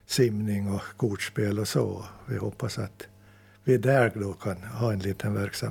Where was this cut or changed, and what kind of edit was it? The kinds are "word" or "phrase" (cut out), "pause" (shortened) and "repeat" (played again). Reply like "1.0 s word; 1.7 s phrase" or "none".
none